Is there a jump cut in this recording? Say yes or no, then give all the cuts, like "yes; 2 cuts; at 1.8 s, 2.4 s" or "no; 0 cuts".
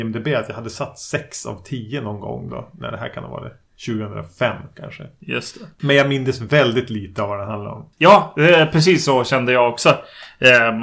no; 0 cuts